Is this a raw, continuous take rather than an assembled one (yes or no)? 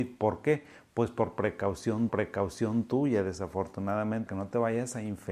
no